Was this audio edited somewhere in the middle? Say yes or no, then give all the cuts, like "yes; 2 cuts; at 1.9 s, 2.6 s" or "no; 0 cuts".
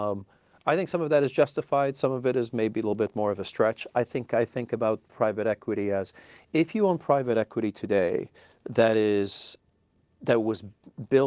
no; 0 cuts